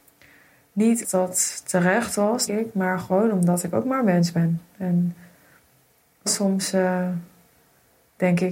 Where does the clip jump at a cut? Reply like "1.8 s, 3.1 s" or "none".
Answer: 1.0 s, 2.5 s, 6.3 s